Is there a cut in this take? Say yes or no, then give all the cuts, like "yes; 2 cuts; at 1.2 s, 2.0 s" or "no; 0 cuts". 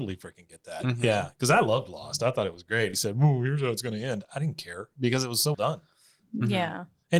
yes; 2 cuts; at 2.9 s, 5.5 s